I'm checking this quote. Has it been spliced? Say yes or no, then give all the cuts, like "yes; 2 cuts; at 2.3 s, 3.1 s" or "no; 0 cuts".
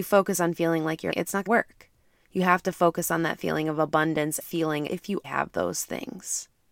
yes; 5 cuts; at 1.1 s, 1.5 s, 4.4 s, 4.9 s, 5.2 s